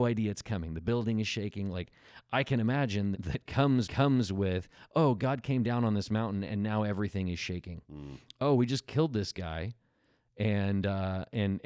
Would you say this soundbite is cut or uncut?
cut